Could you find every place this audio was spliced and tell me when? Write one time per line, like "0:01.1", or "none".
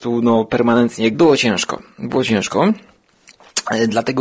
0:01.1

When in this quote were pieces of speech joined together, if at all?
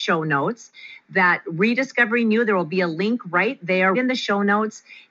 0:03.9

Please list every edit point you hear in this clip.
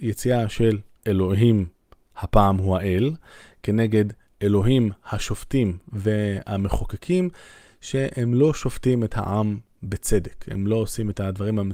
none

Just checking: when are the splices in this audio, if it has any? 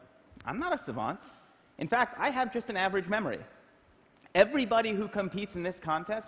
none

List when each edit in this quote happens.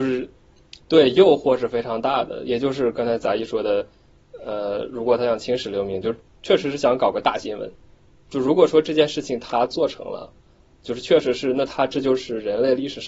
none

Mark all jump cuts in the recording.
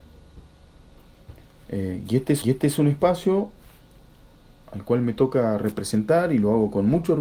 0:02.4

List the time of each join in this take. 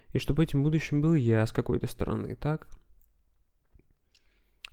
none

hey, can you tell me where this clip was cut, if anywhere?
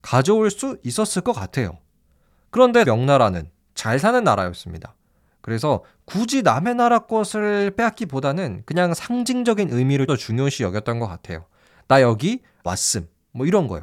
0:02.8
0:10.1
0:12.7

